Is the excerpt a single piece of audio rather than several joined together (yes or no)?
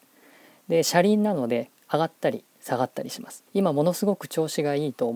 no